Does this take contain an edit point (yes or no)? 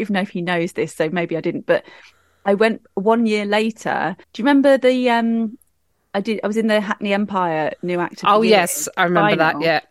yes